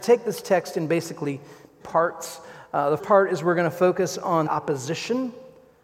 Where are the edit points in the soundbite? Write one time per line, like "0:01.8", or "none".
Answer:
0:01.8
0:03.0
0:04.5